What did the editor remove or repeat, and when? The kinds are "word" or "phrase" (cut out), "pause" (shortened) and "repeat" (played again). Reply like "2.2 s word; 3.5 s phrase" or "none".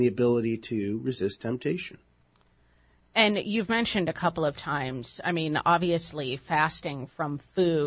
none